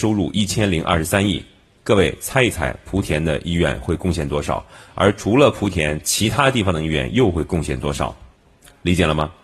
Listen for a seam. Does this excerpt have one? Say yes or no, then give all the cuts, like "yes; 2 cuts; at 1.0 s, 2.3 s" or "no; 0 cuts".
no; 0 cuts